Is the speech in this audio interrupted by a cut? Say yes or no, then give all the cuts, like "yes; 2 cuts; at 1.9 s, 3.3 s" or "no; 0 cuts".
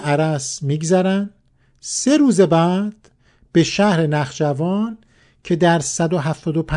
no; 0 cuts